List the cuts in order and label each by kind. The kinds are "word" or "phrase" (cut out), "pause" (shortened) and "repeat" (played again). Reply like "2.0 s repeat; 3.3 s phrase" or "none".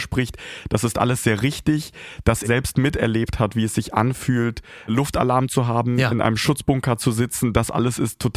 2.4 s word; 4.9 s word

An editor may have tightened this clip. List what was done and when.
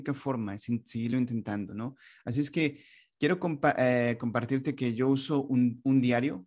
none

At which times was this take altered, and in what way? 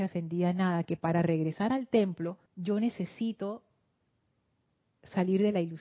2.5 s pause

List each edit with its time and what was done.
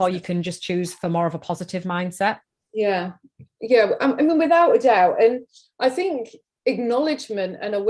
none

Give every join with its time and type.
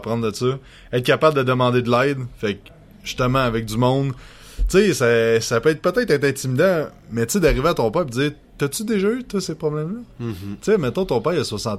none

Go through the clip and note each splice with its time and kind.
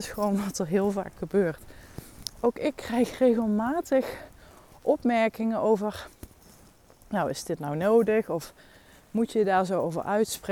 none

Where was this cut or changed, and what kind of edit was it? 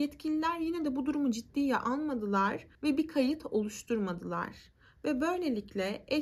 2.7 s pause

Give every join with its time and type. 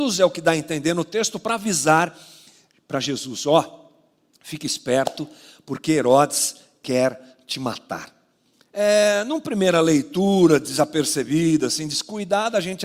none

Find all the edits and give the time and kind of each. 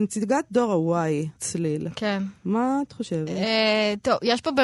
1.4 s word

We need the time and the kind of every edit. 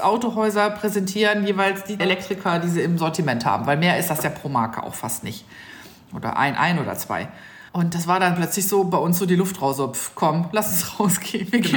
2.0 s word; 7.7 s pause

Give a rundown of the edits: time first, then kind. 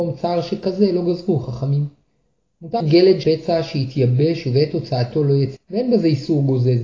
2.8 s word; 3.2 s word; 5.6 s word

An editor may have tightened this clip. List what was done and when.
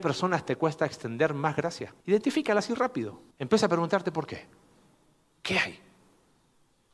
2.0 s pause; 3.3 s pause

